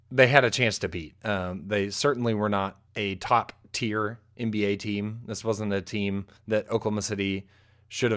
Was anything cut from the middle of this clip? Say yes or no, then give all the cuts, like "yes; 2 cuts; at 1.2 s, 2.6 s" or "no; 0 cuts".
yes; 2 cuts; at 2.9 s, 6.4 s